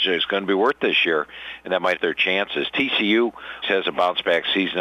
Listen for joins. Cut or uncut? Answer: cut